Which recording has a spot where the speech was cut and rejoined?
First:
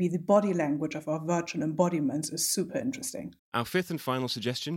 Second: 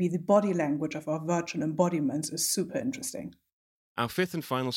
first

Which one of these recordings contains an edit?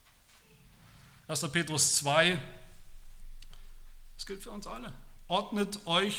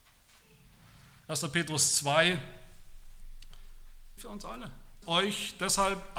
second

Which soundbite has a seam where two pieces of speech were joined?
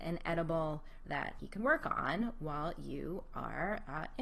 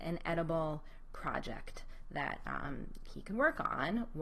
first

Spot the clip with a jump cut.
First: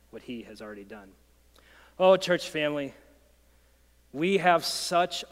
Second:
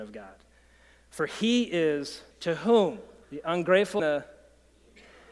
second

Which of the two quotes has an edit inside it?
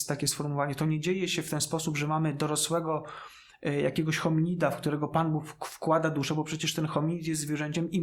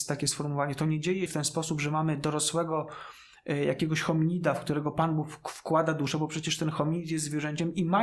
second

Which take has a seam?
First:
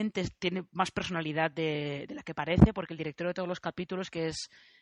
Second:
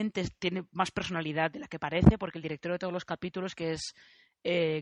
second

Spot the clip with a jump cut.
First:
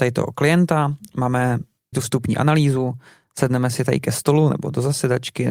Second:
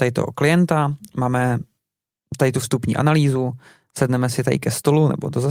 first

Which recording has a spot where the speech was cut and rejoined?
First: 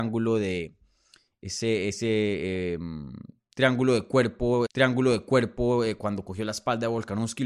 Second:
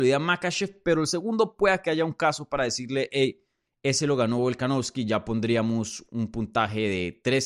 first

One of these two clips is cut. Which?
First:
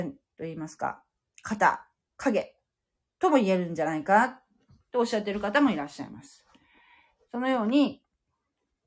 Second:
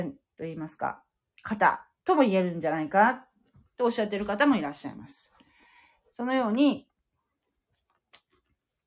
second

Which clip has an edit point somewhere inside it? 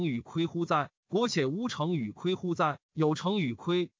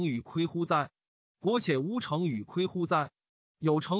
first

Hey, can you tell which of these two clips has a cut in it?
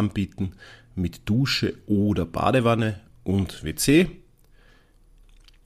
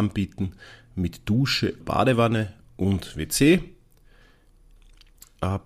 second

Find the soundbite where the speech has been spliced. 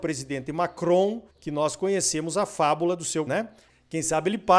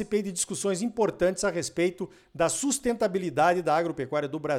first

